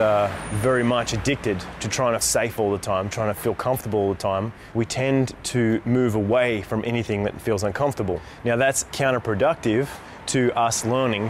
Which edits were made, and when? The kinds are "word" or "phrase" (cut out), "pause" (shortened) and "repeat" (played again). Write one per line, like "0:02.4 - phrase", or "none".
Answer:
0:02.2 - word
0:04.7 - word
0:08.9 - word